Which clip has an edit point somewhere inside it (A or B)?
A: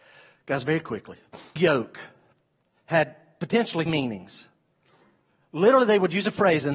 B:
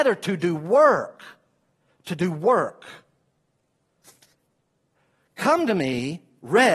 A